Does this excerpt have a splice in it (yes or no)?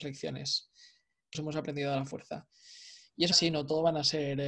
yes